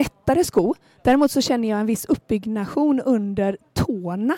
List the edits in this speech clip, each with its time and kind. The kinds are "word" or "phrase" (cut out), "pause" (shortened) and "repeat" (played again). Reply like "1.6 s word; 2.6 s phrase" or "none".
none